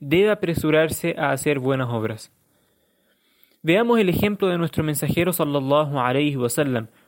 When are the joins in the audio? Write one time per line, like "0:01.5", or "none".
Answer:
none